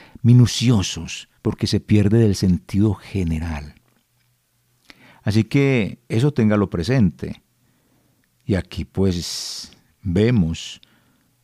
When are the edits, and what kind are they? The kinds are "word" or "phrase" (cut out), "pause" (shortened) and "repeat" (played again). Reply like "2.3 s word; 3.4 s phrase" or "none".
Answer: 1.4 s pause

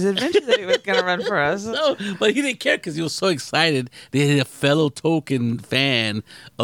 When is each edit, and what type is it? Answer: none

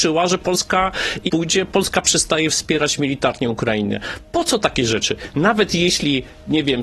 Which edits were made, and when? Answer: 1.3 s phrase

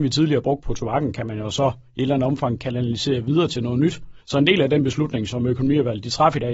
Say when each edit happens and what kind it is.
4.2 s pause

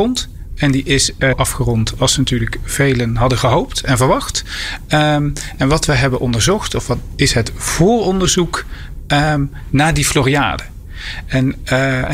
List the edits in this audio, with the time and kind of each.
1.3 s phrase

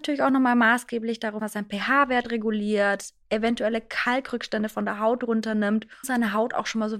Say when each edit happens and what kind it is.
1.4 s word; 6.0 s word

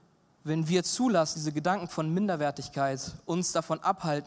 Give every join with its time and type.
1.3 s word

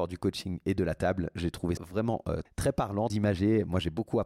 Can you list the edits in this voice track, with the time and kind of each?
1.8 s word; 2.4 s word; 3.1 s word

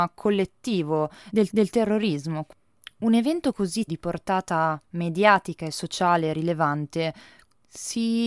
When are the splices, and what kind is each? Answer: 1.5 s repeat; 3.9 s word

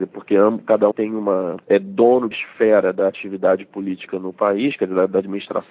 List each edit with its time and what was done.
0.9 s word; 1.6 s pause; 2.3 s phrase

